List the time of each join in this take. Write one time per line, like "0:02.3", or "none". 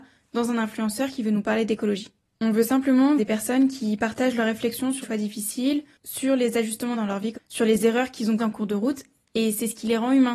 0:03.2
0:05.0
0:06.9
0:07.3
0:08.4

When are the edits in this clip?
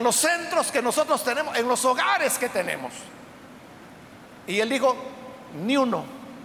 0:04.4

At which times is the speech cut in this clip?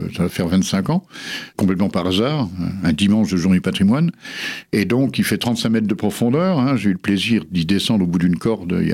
0:01.5

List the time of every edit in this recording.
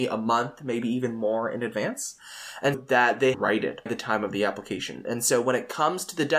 0:02.7
0:03.3
0:03.9

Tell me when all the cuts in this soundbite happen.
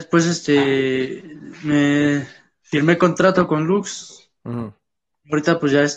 none

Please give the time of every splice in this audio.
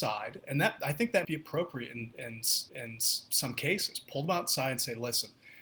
0:01.2
0:02.7

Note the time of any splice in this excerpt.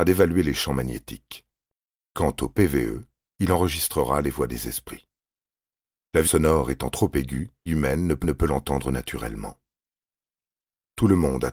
0:06.2
0:07.7
0:08.2

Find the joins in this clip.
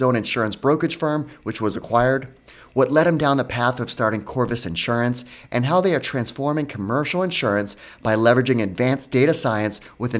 none

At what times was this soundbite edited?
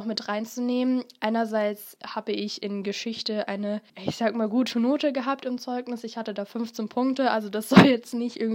0:02.0
0:03.9

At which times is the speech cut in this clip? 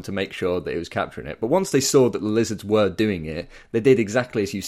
none

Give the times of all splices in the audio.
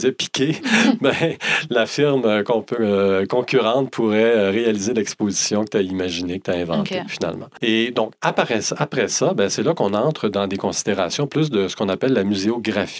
none

